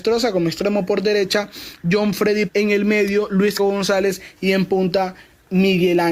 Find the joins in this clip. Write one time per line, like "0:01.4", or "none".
0:02.5
0:03.6